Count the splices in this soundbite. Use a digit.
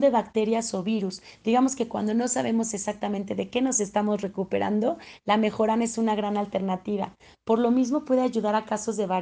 0